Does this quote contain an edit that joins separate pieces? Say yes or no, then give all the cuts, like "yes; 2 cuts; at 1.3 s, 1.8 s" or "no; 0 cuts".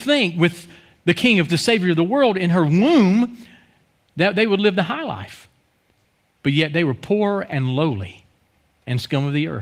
yes; 1 cut; at 1.5 s